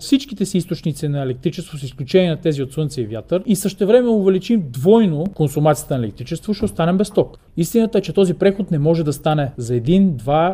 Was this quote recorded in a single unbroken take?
yes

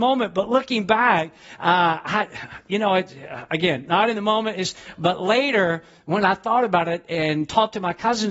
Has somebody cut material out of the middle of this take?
no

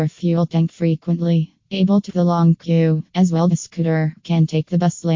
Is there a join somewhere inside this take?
yes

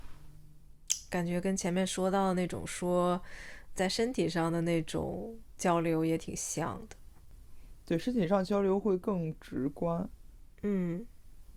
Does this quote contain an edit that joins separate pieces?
yes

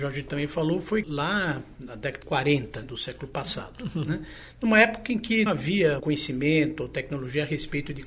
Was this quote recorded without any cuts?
no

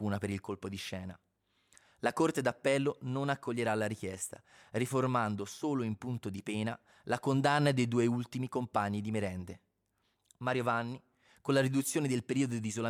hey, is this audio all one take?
yes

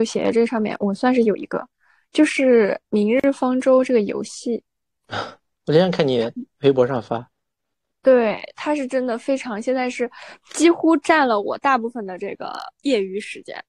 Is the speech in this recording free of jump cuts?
yes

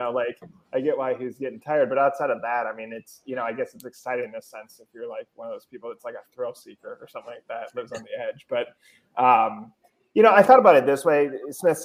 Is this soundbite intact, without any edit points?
yes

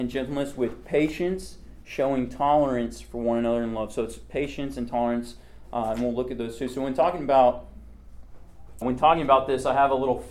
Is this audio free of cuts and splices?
no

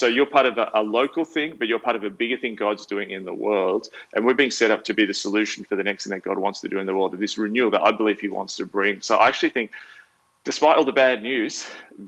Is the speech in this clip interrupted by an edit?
no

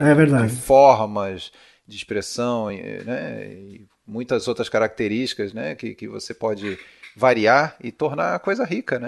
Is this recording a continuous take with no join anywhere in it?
yes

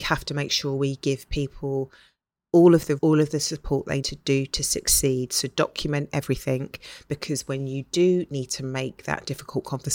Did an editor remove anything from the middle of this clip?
yes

